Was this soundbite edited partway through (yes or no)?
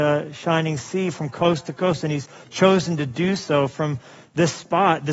no